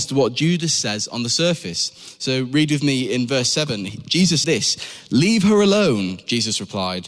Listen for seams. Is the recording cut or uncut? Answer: cut